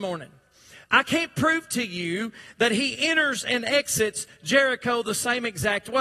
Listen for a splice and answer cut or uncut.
uncut